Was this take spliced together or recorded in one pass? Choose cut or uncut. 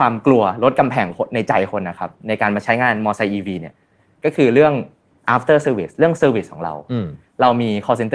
uncut